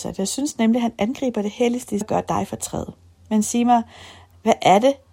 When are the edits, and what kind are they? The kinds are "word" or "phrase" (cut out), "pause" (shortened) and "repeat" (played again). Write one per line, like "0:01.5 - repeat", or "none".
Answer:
0:02.0 - phrase